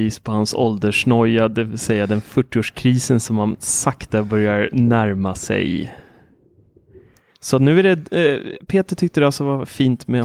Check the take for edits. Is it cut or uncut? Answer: uncut